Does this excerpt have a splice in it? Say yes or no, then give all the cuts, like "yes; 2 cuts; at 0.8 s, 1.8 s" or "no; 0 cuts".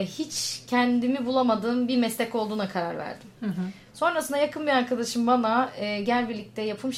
no; 0 cuts